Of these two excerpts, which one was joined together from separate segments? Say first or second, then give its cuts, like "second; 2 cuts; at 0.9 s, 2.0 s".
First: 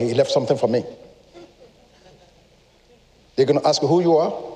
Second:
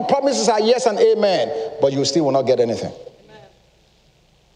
second; 1 cut; at 3.2 s